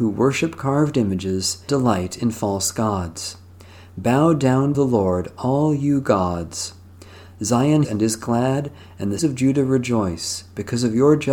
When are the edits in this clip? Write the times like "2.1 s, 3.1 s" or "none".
1.7 s, 4.7 s, 7.8 s, 9.2 s